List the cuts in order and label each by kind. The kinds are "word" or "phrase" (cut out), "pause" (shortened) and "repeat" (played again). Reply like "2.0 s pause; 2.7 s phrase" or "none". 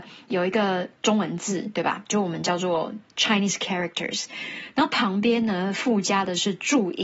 1.0 s pause